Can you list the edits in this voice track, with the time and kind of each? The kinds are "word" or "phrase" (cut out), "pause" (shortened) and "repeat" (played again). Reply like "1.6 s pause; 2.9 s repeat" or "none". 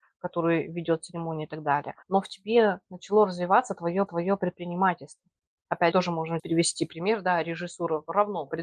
2.0 s pause; 4.1 s repeat; 5.9 s phrase; 6.4 s word